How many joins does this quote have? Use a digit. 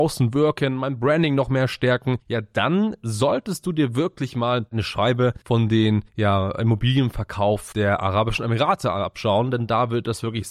3